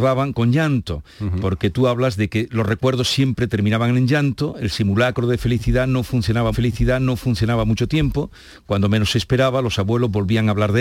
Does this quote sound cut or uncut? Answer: cut